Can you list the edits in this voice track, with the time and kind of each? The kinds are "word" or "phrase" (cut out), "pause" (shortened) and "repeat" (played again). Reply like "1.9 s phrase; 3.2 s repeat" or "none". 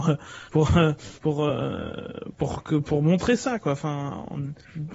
none

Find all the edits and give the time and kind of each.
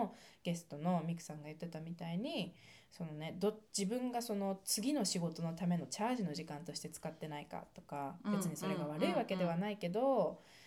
3.7 s pause

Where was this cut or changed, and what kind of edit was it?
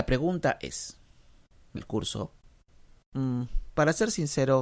1.8 s word

